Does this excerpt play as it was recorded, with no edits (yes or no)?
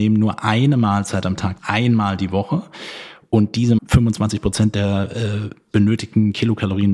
no